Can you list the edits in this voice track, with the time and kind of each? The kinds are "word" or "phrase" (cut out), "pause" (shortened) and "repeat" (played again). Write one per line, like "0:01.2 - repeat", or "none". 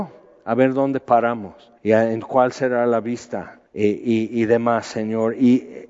0:01.8 - pause
0:03.7 - pause